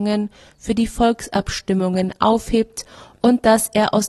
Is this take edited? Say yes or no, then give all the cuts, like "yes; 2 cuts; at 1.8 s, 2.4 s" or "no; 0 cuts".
no; 0 cuts